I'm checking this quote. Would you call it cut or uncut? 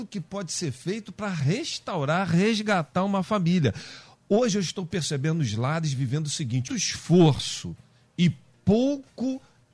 cut